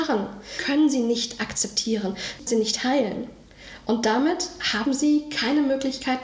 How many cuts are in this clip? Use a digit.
1